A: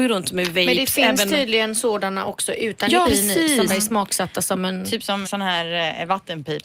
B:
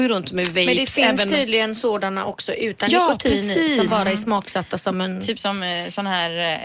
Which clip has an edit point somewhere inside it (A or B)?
A